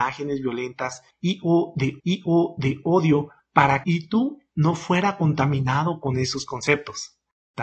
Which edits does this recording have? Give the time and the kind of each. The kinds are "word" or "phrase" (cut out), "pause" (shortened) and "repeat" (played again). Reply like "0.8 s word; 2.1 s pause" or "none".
2.0 s repeat; 3.8 s phrase